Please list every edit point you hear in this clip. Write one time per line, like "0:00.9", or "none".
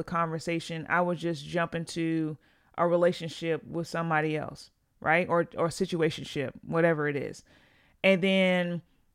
none